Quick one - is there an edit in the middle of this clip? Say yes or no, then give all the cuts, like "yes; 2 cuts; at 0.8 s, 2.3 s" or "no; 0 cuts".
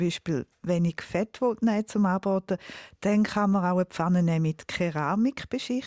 no; 0 cuts